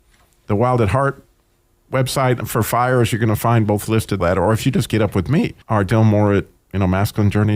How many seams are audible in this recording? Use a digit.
3